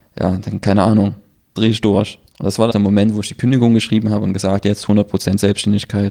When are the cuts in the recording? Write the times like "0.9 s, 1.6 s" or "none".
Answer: 1.6 s, 2.3 s, 2.7 s